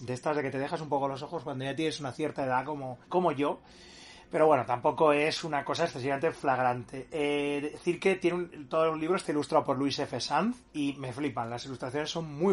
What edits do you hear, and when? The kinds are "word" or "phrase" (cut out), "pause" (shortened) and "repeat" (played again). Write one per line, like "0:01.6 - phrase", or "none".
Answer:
0:03.0 - pause